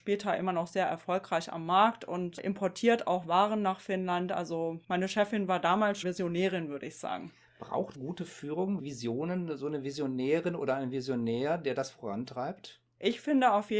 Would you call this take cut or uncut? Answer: cut